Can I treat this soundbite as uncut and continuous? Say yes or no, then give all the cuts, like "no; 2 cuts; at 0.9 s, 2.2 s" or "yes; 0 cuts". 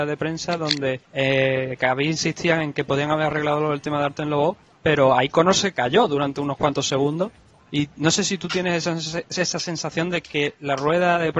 no; 3 cuts; at 1.0 s, 4.6 s, 7.6 s